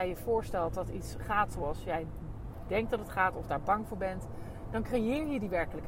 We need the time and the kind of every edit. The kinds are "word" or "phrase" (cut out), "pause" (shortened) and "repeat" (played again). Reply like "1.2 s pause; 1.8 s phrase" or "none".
none